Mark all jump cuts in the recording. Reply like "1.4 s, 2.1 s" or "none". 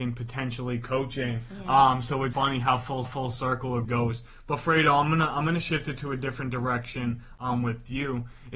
2.3 s, 3.0 s, 3.8 s